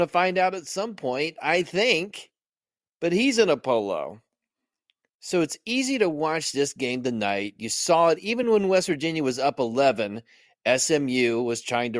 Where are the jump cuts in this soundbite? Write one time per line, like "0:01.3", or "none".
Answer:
none